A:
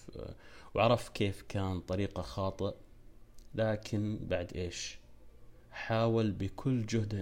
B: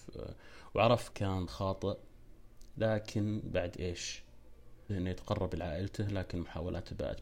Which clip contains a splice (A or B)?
B